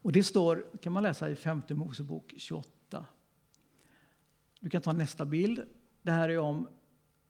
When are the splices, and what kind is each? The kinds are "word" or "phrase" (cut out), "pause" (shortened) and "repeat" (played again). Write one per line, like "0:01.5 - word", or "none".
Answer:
none